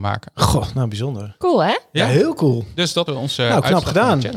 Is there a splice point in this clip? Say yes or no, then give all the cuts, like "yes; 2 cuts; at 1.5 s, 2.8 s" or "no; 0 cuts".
yes; 1 cut; at 3.1 s